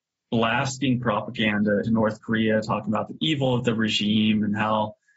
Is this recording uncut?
no; 1 cut; at 1.8 s

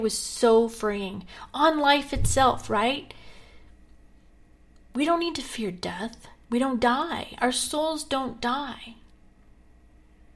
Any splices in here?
no; 0 cuts

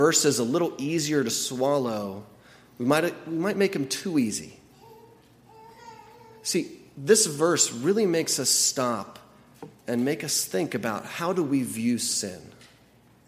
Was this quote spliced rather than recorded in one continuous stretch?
no; 0 cuts

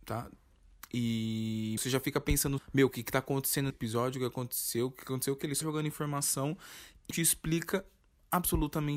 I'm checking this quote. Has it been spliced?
yes; 5 cuts; at 1.8 s, 2.6 s, 3.7 s, 5.6 s, 7.1 s

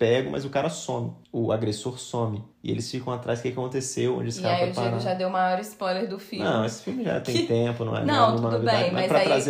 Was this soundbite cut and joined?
yes; 2 cuts; at 1.2 s, 2.5 s

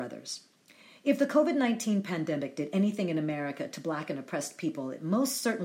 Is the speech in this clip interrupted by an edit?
no; 0 cuts

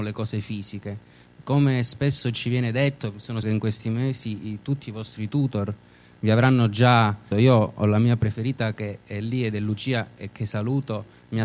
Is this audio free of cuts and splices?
no; 2 cuts; at 3.4 s, 7.3 s

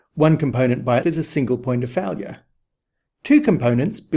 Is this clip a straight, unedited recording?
no; 1 cut; at 1.0 s

